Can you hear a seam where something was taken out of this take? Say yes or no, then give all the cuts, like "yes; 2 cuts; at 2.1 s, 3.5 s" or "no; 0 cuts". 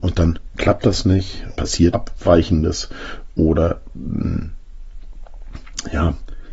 yes; 2 cuts; at 1.5 s, 1.9 s